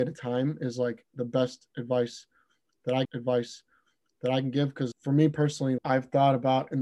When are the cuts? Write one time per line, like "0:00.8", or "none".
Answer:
0:03.0
0:04.9
0:05.8